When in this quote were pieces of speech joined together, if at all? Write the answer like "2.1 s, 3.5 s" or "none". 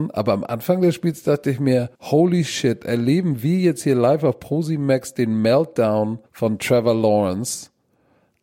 1.9 s, 6.3 s